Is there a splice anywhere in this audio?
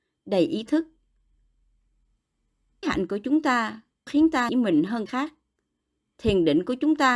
yes; 4 cuts; at 2.8 s, 4.1 s, 4.5 s, 5.1 s

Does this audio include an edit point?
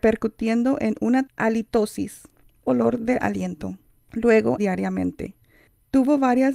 yes; 3 cuts; at 1.3 s, 2.6 s, 4.6 s

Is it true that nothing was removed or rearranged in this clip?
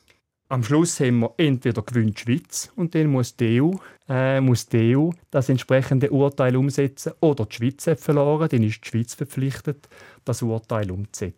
no; 2 cuts; at 4.0 s, 5.2 s

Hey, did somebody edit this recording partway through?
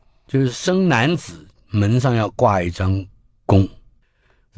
no; 0 cuts

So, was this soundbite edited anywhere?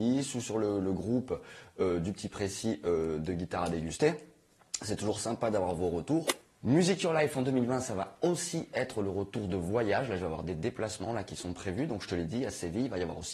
no; 0 cuts

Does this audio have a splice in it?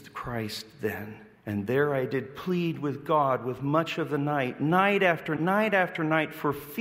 yes; 2 cuts; at 1.3 s, 5.4 s

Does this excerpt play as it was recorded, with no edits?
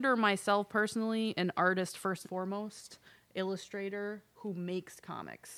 no; 1 cut; at 2.2 s

